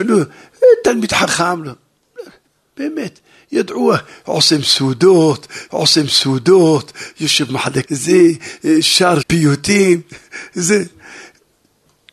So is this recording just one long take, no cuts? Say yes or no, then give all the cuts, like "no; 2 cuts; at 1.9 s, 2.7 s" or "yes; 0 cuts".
no; 4 cuts; at 2.5 s, 5.7 s, 7.8 s, 9.2 s